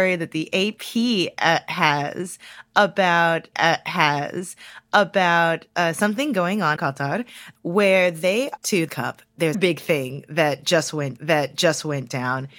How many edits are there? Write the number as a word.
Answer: six